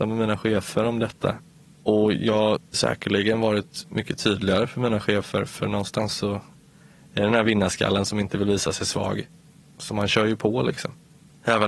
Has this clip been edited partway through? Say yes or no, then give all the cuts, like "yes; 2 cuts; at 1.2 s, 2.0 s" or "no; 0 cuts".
yes; 1 cut; at 2.7 s